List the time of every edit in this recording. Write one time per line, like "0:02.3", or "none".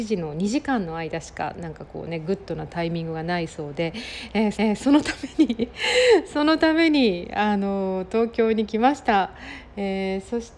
0:04.5